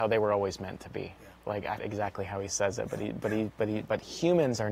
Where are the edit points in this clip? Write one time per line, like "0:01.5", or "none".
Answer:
0:01.8